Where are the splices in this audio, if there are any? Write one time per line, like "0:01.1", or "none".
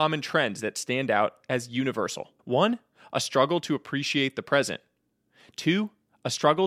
0:02.4